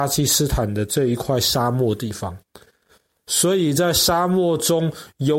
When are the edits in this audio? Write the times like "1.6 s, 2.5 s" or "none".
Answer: none